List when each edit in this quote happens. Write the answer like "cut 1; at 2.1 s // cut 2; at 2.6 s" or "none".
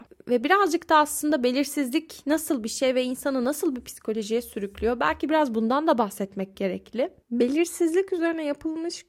cut 1; at 7.2 s